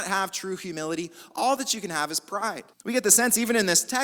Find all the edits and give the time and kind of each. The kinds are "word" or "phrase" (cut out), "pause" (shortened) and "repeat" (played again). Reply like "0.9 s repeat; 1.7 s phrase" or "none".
2.7 s pause